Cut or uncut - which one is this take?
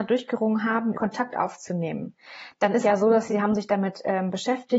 cut